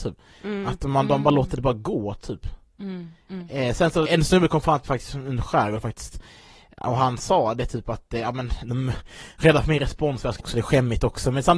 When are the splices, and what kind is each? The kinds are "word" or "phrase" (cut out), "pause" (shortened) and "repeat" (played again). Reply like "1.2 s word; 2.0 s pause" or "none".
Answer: 4.1 s word; 10.4 s word